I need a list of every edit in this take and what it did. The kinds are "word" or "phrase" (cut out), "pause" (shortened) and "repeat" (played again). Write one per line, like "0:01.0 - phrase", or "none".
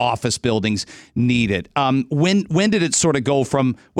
none